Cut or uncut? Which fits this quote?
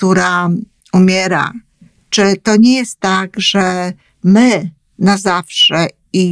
uncut